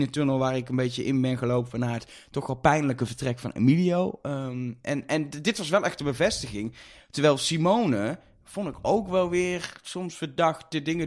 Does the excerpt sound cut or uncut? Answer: uncut